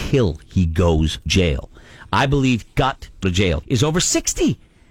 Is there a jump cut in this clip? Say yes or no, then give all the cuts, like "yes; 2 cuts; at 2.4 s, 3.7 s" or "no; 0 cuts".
yes; 4 cuts; at 1.3 s, 2.6 s, 3.2 s, 3.6 s